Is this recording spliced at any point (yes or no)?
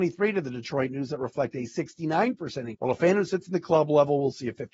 yes